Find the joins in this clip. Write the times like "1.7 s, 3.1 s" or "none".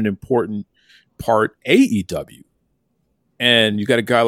1.6 s